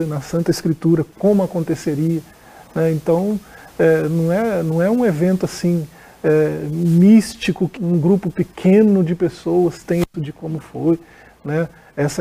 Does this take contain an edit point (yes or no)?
yes